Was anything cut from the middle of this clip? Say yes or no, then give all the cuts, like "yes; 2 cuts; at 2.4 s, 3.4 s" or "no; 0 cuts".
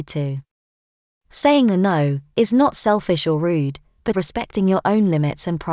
yes; 1 cut; at 4.1 s